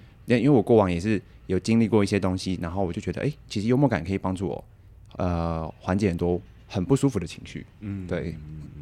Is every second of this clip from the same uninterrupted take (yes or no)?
yes